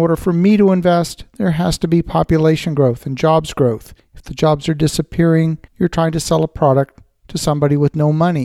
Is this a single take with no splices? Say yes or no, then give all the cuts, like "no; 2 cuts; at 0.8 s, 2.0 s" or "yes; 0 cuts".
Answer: no; 2 cuts; at 4.0 s, 5.7 s